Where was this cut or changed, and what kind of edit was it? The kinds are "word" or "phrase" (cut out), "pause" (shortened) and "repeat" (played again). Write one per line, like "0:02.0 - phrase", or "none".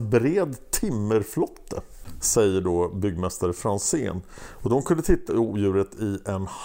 0:05.3 - phrase